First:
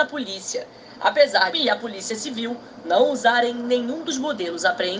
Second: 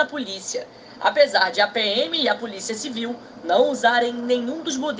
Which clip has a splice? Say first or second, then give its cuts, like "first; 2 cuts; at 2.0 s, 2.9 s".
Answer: first; 1 cut; at 1.5 s